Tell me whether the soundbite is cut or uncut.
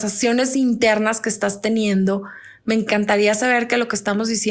uncut